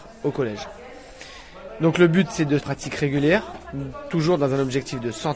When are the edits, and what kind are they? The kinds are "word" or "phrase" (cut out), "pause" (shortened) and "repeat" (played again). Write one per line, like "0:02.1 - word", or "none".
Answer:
0:02.6 - phrase